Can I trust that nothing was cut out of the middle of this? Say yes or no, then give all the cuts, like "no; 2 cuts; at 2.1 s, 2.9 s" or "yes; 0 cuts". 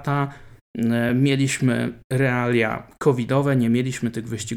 yes; 0 cuts